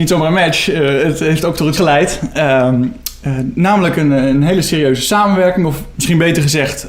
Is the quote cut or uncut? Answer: cut